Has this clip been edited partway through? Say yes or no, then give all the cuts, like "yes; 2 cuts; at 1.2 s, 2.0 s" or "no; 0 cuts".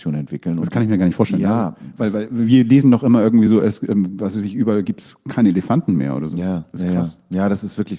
no; 0 cuts